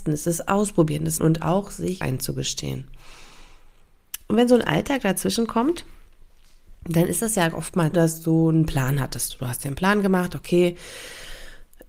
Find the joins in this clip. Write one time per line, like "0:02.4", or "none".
0:01.2
0:02.0
0:06.8
0:07.9